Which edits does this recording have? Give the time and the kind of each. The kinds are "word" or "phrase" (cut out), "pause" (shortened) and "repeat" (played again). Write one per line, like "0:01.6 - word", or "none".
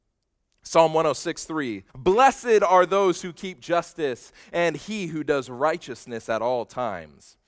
0:01.9 - pause